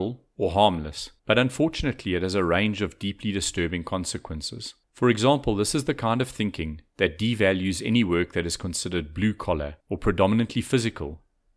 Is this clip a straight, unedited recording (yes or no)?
no